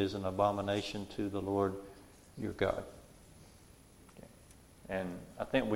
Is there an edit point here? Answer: no; 0 cuts

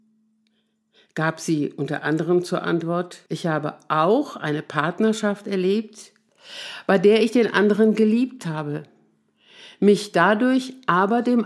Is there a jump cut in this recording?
yes; 1 cut; at 3.3 s

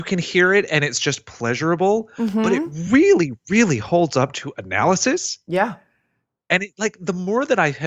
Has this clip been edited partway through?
no; 0 cuts

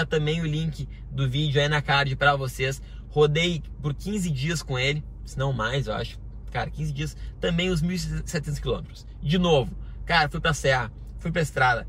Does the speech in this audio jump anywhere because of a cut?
no; 0 cuts

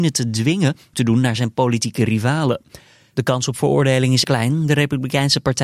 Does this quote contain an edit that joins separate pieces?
yes; 2 cuts; at 0.9 s, 4.2 s

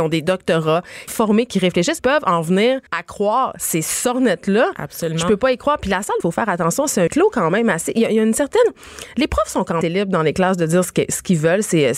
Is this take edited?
yes; 6 cuts; at 1.1 s, 2.0 s, 2.9 s, 6.2 s, 7.1 s, 9.8 s

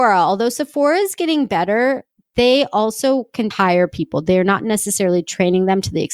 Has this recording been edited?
yes; 1 cut; at 3.5 s

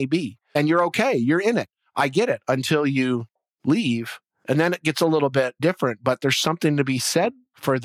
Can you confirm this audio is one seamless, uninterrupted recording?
yes; 0 cuts

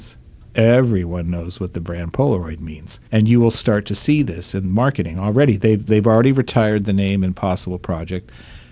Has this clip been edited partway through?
yes; 2 cuts; at 3.1 s, 5.9 s

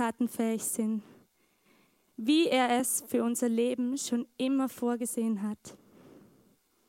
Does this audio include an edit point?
no; 0 cuts

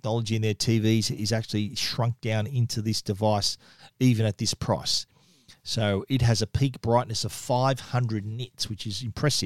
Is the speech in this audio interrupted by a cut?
no; 0 cuts

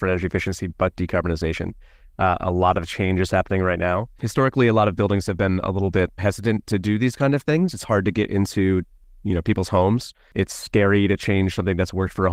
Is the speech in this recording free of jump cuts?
no; 1 cut; at 6.2 s

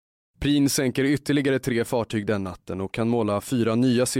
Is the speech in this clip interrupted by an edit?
no; 0 cuts

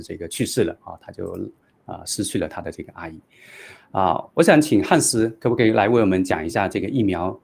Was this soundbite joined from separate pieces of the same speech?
no; 0 cuts

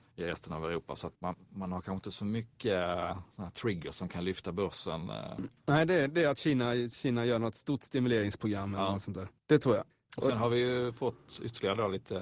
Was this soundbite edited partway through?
yes; 1 cut; at 1.1 s

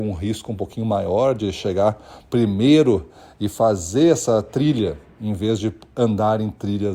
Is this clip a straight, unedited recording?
yes; 0 cuts

